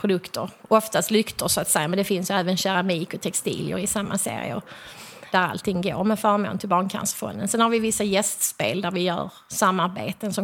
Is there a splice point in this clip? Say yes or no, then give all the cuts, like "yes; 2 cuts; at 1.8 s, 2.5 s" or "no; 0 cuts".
yes; 1 cut; at 5.3 s